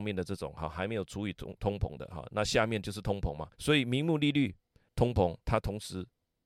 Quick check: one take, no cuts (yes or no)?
no